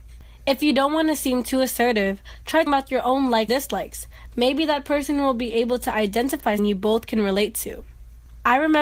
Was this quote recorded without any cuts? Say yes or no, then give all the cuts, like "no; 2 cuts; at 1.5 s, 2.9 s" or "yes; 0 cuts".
no; 3 cuts; at 2.7 s, 3.5 s, 6.6 s